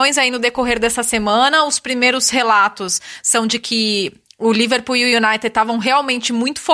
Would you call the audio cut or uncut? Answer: uncut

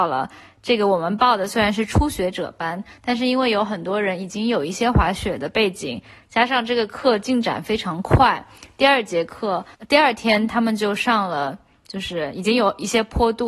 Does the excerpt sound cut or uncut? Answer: cut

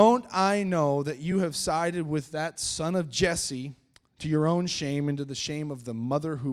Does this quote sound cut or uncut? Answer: uncut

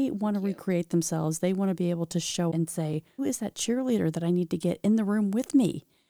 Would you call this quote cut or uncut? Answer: cut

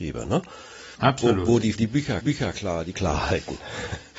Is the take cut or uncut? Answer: cut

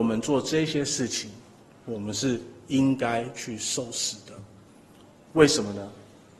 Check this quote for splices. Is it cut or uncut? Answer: uncut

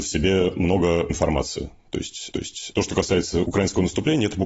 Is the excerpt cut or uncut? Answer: cut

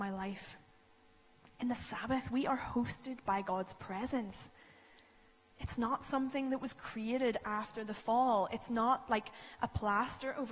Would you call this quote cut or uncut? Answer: uncut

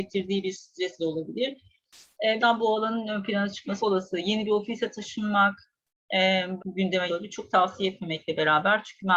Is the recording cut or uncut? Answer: cut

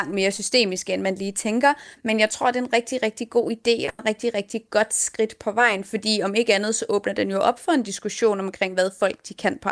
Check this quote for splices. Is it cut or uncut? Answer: uncut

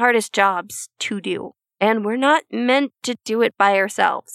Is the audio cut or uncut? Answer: uncut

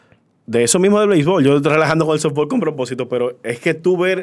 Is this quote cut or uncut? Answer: uncut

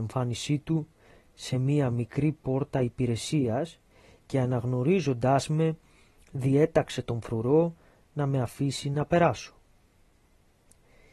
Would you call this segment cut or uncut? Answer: uncut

